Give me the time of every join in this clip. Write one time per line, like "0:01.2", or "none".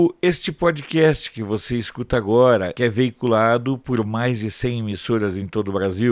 0:02.8